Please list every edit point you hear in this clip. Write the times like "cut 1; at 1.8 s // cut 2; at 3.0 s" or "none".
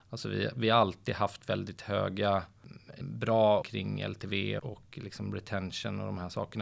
cut 1; at 3.0 s // cut 2; at 3.6 s // cut 3; at 4.6 s